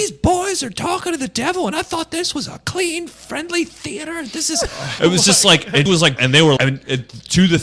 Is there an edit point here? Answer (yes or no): yes